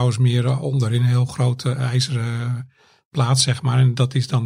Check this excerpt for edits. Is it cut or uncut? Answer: uncut